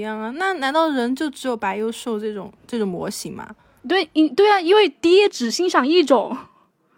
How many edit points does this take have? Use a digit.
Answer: 0